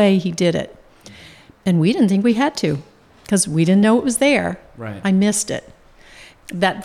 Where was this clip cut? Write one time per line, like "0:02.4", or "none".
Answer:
none